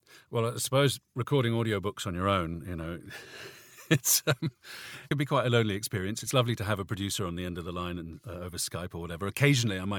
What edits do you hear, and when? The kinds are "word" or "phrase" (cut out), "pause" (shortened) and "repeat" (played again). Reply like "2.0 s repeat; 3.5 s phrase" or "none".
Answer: none